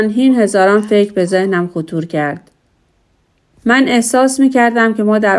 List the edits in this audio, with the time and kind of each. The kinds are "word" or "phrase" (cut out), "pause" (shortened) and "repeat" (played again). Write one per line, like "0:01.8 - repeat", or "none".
none